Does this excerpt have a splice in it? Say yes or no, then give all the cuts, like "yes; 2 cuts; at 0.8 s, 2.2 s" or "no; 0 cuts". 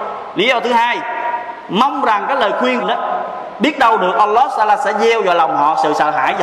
yes; 1 cut; at 2.8 s